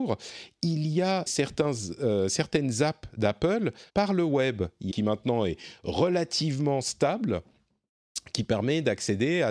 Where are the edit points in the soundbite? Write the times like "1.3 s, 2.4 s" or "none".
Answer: 1.3 s, 3.9 s, 4.9 s